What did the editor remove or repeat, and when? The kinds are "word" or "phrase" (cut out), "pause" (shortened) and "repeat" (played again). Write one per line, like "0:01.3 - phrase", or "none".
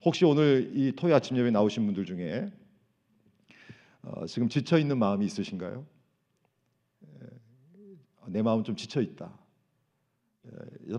none

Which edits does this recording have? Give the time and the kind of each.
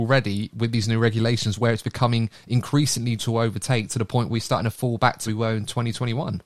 0:03.2 - word
0:04.3 - word
0:05.3 - word

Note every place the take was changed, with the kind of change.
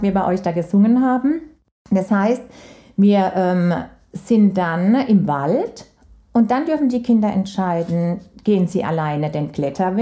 none

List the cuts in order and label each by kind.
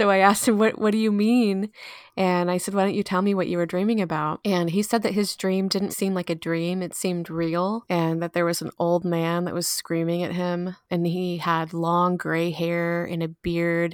0:05.9 - word

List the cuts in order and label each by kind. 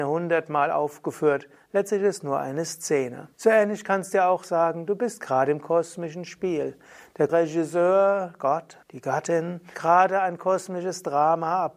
0:03.3 - pause
0:07.3 - word
0:08.8 - pause
0:09.7 - word

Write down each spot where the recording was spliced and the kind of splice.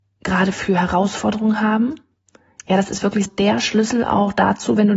0:03.3 - word

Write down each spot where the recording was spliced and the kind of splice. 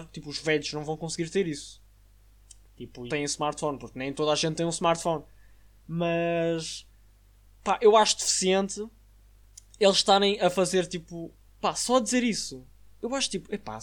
0:03.1 - phrase

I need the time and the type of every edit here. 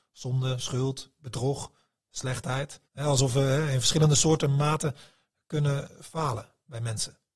0:02.8 - pause

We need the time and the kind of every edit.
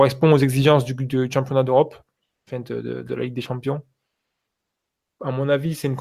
none

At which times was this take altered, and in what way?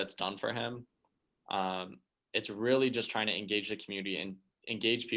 none

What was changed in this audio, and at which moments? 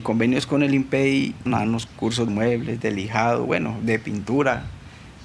0:01.5 - phrase
0:01.9 - word
0:02.3 - phrase

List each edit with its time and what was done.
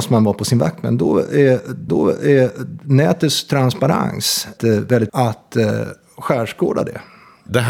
0:01.9 - repeat
0:04.6 - word
0:05.1 - phrase

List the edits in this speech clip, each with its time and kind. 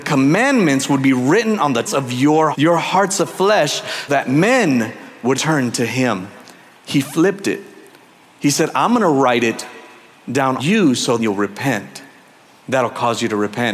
0:01.9 - word
0:02.5 - word
0:04.1 - word
0:05.3 - word
0:10.6 - word
0:11.2 - word

